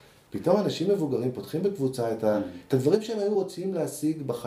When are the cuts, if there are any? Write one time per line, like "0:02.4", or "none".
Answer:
none